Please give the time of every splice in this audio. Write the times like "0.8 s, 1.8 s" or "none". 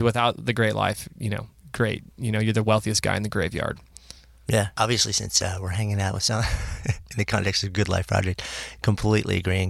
none